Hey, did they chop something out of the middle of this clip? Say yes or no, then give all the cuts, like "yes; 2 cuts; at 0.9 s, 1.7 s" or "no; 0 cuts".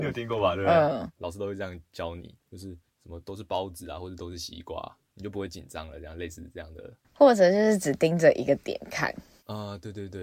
yes; 3 cuts; at 2.4 s, 2.9 s, 7.0 s